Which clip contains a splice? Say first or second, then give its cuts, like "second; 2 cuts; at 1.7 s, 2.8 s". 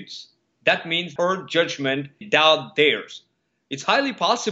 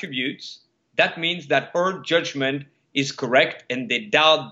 first; 2 cuts; at 1.2 s, 2.2 s